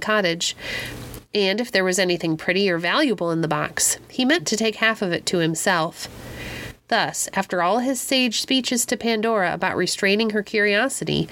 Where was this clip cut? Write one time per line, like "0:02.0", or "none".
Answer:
none